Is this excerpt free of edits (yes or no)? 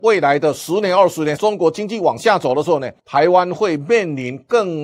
no